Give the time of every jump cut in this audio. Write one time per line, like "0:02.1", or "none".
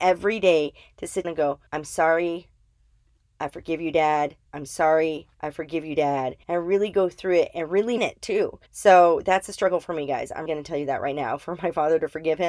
0:01.2
0:01.7
0:04.5
0:05.3
0:06.4
0:08.0
0:08.7
0:10.5

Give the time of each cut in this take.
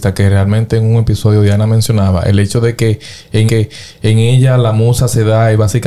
0:03.5

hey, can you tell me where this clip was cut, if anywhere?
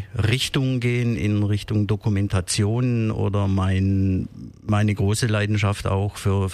none

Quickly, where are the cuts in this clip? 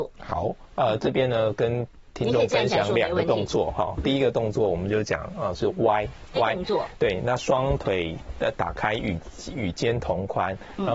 0:06.4

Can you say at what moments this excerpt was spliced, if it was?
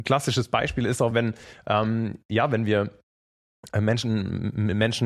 none

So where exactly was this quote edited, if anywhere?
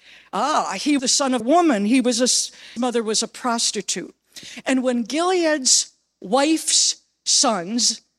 0:01.0
0:01.4
0:02.8

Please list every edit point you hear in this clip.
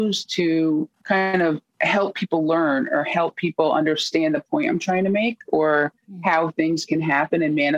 0:00.9
0:01.7

